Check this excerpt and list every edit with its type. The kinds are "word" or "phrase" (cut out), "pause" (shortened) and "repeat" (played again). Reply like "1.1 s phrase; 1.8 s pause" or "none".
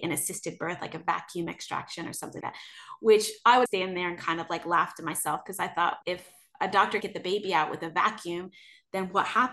2.4 s word; 3.7 s word; 6.0 s word; 7.0 s word